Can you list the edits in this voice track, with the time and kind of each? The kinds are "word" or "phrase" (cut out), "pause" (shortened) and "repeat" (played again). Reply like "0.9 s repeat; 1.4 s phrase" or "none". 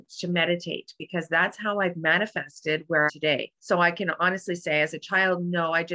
3.1 s phrase; 3.6 s pause